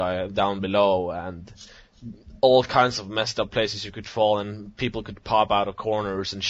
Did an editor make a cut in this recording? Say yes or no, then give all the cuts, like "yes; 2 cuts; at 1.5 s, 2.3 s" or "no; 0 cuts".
no; 0 cuts